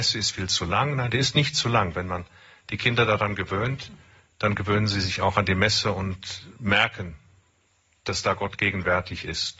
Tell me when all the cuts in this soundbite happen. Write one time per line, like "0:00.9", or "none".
none